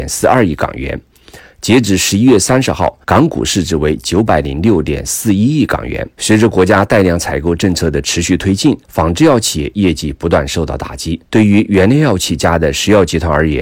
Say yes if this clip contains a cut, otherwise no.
yes